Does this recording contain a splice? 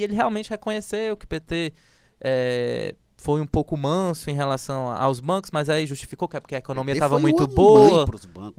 no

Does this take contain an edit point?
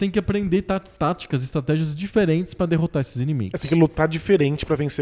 no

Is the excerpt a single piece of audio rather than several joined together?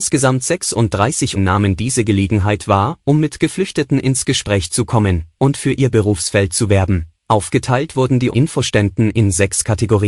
no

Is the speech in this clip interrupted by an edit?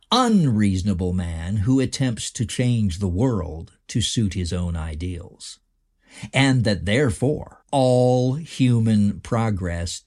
yes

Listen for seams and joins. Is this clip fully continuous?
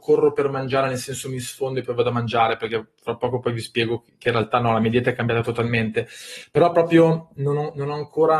yes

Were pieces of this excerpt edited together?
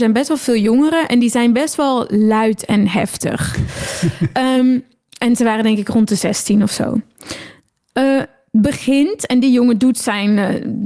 no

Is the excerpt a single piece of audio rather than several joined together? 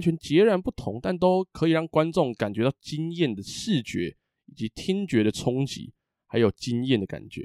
yes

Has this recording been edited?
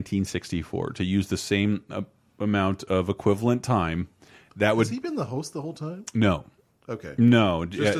no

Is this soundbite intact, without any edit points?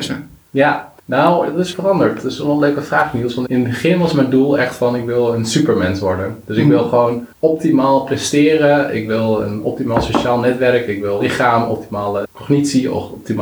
no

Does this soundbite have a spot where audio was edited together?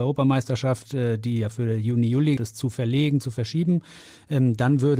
yes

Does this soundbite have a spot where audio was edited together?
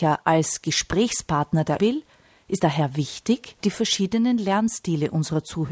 yes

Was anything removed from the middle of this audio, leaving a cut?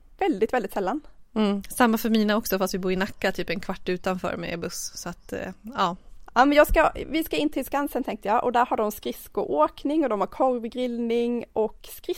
no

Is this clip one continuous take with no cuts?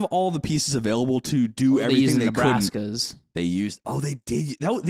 yes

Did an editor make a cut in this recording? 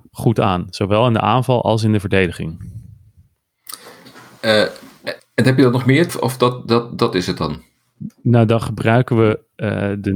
yes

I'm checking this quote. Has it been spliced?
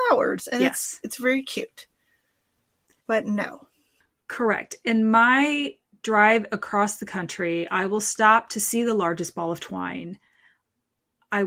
no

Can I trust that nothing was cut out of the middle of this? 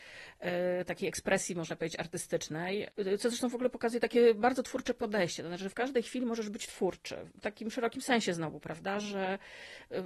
yes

